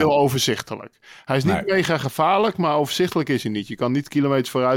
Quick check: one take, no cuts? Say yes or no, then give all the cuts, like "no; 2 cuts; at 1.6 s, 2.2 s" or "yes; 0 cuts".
yes; 0 cuts